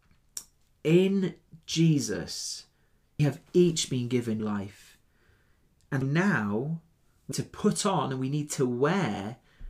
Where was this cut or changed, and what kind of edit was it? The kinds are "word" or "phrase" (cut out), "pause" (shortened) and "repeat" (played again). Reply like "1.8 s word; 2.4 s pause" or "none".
3.2 s word; 4.4 s word; 6.0 s word; 7.3 s word

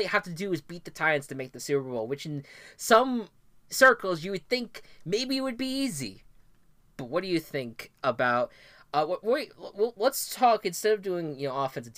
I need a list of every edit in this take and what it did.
none

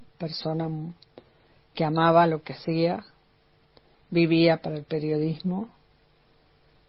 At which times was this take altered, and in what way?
none

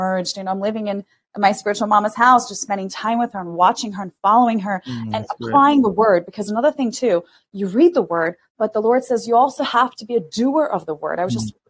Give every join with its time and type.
none

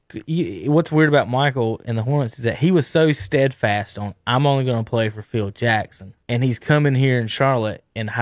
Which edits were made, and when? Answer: 6.2 s pause

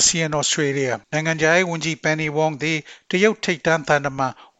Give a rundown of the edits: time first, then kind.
1.0 s pause

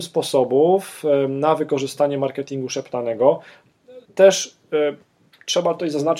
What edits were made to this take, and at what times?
4.0 s pause

